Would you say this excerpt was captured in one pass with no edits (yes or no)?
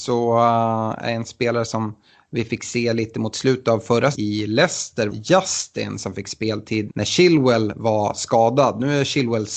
no